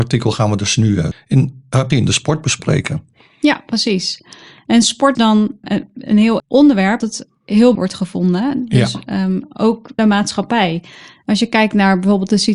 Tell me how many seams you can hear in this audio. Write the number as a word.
eight